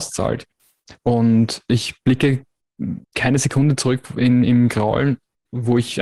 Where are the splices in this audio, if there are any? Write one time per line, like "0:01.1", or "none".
0:03.0